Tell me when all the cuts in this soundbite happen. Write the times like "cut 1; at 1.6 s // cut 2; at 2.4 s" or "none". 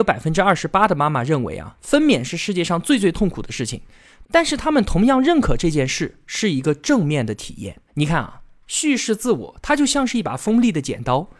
cut 1; at 7.9 s